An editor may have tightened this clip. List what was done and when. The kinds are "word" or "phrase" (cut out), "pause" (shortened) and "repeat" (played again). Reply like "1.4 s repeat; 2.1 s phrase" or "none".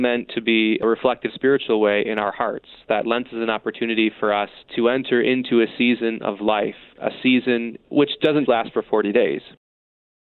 1.3 s word; 8.5 s word